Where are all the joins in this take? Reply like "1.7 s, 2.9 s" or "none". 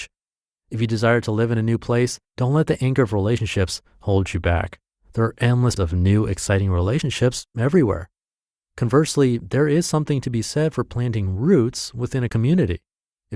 2.2 s, 5.8 s